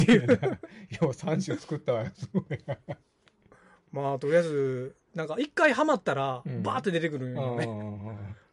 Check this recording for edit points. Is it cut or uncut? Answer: uncut